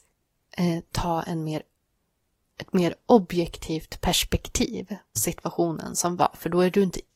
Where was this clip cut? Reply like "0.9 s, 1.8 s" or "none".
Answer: 5.2 s